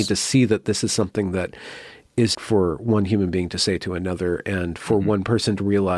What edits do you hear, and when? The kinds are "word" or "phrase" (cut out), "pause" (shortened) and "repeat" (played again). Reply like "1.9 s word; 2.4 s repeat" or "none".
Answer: 2.3 s word